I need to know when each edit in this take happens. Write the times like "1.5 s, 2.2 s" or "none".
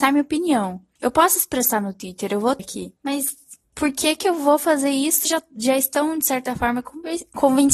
2.6 s, 3.0 s, 5.2 s